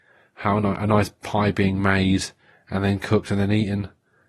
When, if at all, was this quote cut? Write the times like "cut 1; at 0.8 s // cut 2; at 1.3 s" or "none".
none